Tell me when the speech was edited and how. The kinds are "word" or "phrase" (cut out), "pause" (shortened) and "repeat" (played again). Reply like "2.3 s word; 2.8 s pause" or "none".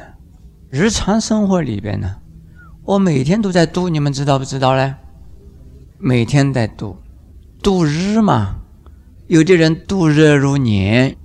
none